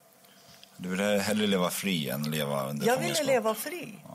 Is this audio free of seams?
yes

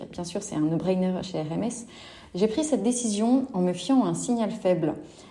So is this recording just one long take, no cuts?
yes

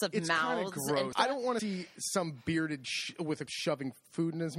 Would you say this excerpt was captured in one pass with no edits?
no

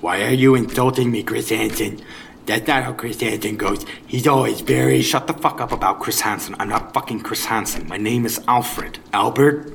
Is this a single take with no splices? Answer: yes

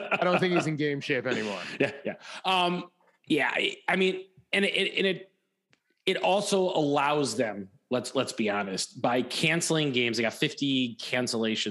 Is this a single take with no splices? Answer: yes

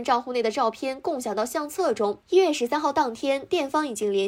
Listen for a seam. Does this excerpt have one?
yes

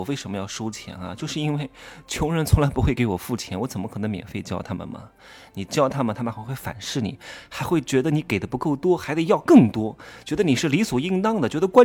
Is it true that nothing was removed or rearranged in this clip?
yes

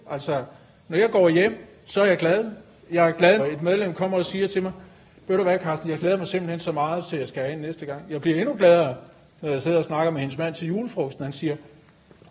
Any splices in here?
yes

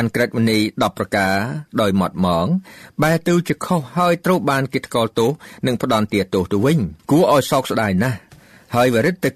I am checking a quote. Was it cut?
yes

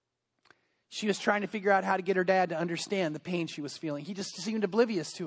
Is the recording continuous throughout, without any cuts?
yes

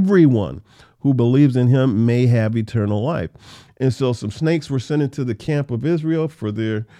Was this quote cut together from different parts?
no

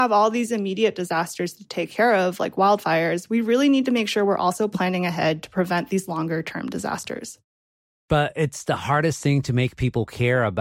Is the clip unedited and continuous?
yes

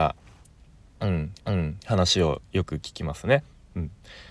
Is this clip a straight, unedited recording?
no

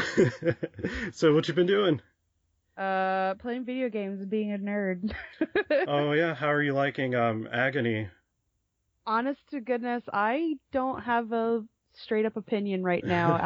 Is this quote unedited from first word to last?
yes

